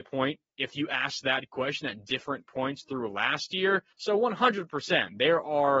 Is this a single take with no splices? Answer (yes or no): no